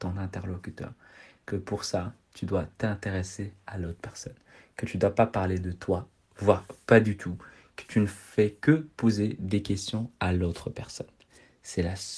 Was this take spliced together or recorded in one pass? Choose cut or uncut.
uncut